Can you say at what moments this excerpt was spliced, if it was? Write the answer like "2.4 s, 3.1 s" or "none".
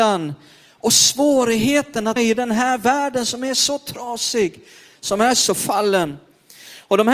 2.2 s, 5.5 s